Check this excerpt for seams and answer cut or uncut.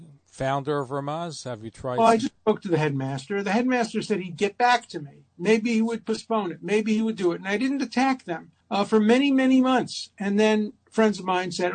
cut